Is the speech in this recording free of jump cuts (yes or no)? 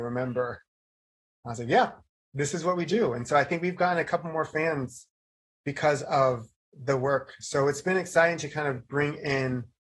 yes